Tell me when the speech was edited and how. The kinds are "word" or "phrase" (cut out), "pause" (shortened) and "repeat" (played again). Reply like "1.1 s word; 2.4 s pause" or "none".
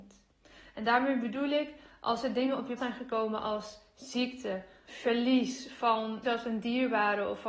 2.8 s word; 4.9 s word; 6.2 s word